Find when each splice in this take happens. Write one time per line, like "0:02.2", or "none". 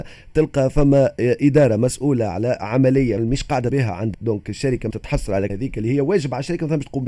0:03.2
0:03.7
0:04.1
0:04.9
0:05.5